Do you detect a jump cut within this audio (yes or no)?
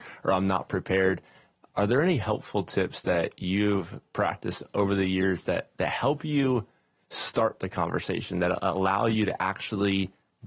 no